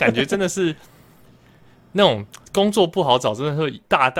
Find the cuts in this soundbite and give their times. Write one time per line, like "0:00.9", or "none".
0:02.5